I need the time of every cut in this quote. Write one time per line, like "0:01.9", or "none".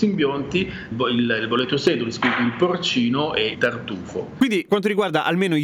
0:00.9
0:03.5
0:04.7